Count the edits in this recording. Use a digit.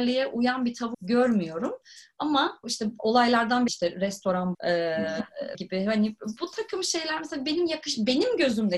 5